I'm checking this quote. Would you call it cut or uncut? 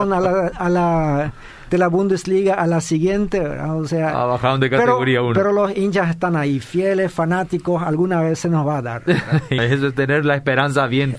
cut